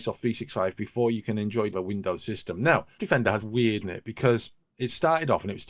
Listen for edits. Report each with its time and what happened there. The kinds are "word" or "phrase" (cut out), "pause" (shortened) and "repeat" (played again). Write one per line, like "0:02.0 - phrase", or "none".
0:01.7 - phrase
0:03.0 - word
0:03.4 - word
0:03.8 - phrase

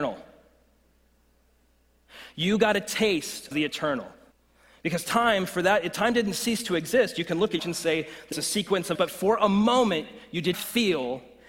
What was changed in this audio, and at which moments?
0:03.5 - word
0:04.3 - pause
0:07.6 - phrase
0:08.3 - word
0:08.9 - word
0:10.5 - word

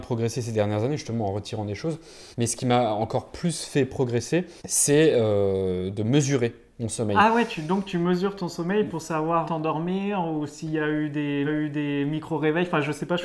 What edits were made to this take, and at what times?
0:02.3 - pause
0:04.6 - pause
0:09.5 - phrase
0:11.5 - repeat

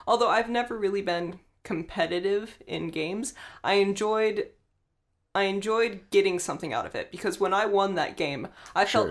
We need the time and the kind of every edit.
none

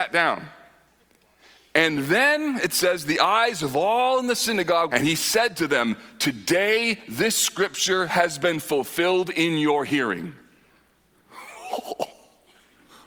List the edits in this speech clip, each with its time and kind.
0:04.9 - phrase

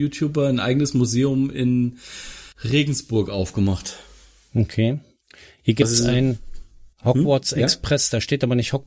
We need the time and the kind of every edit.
0:02.5 - pause
0:05.2 - pause
0:06.9 - pause

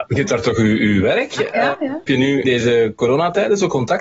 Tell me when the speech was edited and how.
0:02.1 - word
0:02.4 - word

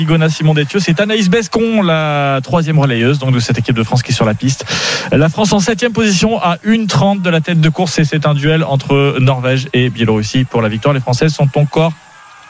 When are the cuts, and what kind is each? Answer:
none

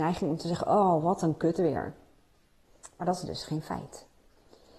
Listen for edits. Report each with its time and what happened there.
none

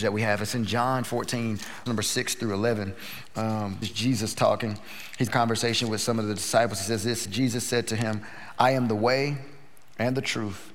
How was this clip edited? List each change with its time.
0:01.0 - word
0:01.9 - word
0:03.8 - word
0:05.3 - word
0:07.2 - word

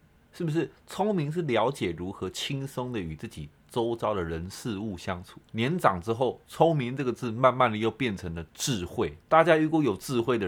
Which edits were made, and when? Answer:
0:05.4 - pause
0:09.2 - pause

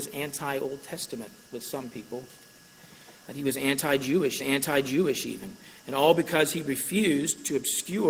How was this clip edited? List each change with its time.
0:04.4 - repeat

